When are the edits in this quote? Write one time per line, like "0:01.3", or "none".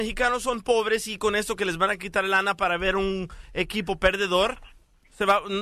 none